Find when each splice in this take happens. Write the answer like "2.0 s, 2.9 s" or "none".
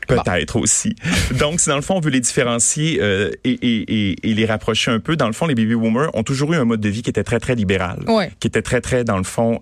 none